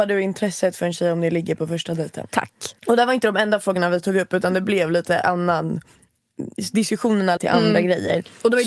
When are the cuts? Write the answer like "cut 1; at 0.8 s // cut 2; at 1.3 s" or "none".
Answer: cut 1; at 2.8 s // cut 2; at 7.4 s